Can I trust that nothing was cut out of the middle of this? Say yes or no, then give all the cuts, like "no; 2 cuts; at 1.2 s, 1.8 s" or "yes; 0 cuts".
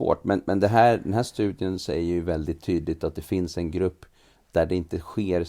yes; 0 cuts